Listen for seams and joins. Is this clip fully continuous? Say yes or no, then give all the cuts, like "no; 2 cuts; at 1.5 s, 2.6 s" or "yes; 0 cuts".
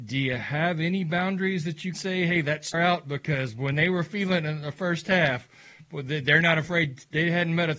no; 2 cuts; at 1.9 s, 2.7 s